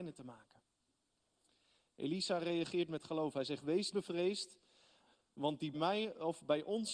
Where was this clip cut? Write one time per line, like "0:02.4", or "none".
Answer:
0:03.9
0:05.7